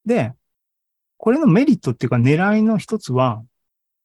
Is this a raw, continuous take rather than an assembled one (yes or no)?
yes